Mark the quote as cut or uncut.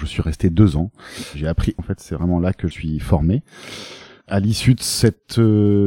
cut